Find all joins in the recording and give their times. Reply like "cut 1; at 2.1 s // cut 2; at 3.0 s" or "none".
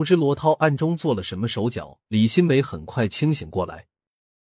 cut 1; at 2.0 s